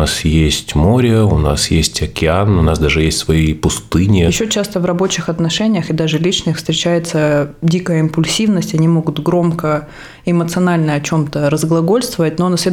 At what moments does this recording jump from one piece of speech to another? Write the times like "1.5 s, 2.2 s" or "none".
none